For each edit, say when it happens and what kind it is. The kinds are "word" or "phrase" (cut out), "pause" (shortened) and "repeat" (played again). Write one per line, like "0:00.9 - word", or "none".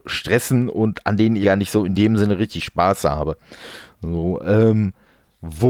0:01.4 - word